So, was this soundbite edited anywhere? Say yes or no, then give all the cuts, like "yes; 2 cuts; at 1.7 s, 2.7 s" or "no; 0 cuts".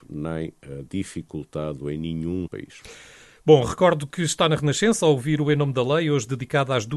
yes; 1 cut; at 2.5 s